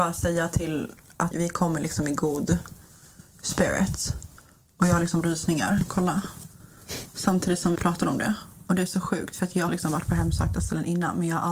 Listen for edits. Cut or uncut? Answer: cut